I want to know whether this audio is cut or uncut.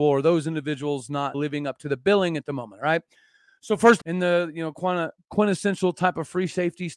cut